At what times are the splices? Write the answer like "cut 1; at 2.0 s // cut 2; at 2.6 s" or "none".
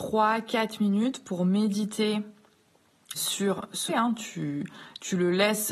cut 1; at 3.1 s // cut 2; at 3.9 s